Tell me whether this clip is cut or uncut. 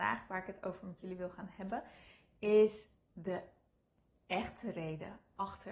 uncut